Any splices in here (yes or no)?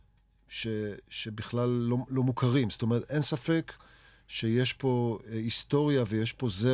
no